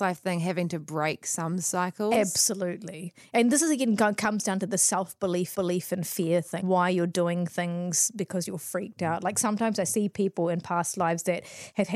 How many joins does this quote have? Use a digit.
2